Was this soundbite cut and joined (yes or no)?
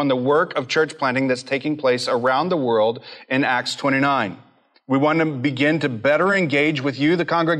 no